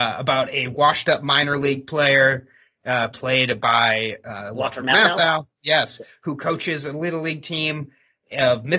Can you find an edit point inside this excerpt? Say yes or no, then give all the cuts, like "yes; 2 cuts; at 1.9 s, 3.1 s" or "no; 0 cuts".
no; 0 cuts